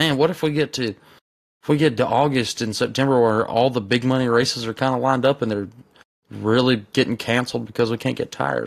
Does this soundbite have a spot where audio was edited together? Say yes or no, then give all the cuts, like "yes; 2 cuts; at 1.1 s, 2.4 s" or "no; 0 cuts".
no; 0 cuts